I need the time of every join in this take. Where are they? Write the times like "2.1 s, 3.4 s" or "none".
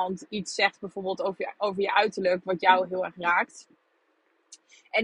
none